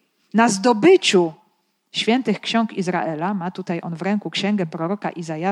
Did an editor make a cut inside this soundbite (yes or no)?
no